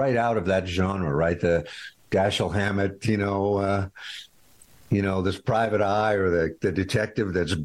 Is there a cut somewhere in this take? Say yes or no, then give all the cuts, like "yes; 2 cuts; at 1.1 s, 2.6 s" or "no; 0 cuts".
no; 0 cuts